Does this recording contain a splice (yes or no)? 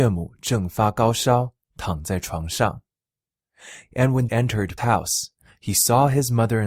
yes